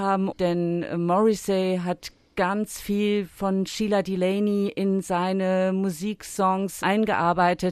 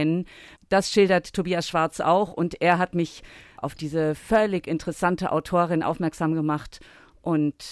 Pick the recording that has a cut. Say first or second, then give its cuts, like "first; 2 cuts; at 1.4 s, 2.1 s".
first; 1 cut; at 6.8 s